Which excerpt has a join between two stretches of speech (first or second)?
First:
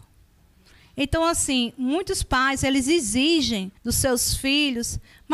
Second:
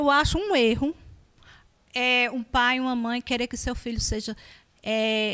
first